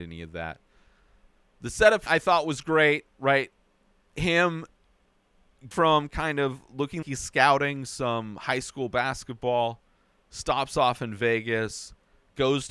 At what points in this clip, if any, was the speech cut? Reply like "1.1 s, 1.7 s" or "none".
2.1 s, 5.7 s, 7.0 s